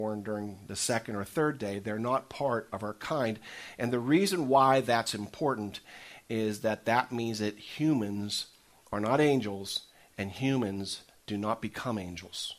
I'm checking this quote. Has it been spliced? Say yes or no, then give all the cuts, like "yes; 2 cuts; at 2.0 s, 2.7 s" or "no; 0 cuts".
no; 0 cuts